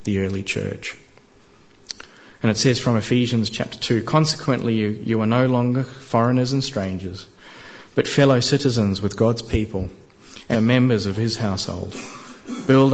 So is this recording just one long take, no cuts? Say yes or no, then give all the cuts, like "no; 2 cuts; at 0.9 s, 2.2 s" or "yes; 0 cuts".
no; 1 cut; at 10.5 s